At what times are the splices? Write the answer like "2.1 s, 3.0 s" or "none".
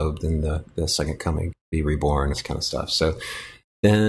1.5 s, 2.3 s